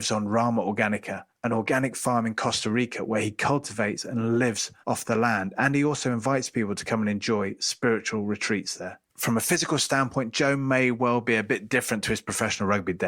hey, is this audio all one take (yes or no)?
no